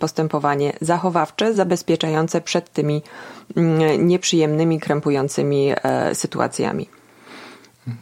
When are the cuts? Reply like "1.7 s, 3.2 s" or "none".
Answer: none

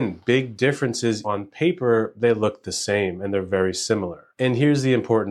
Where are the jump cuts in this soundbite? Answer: 1.2 s

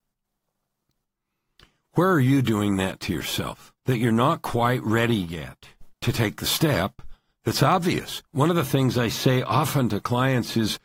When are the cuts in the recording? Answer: 3.8 s, 5.9 s, 8.3 s

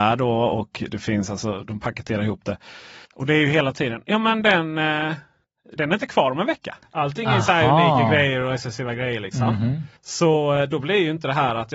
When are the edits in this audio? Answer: 3.1 s, 5.8 s, 6.8 s, 10.0 s

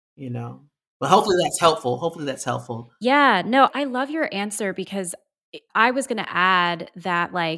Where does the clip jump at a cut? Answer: 3.7 s, 5.7 s

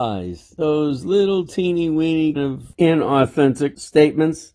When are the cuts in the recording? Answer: 2.4 s

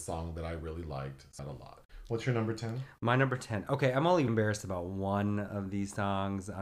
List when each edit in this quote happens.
1.4 s, 4.3 s

